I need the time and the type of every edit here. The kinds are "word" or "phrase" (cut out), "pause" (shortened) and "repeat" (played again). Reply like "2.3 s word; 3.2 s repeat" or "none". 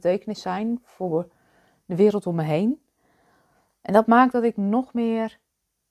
none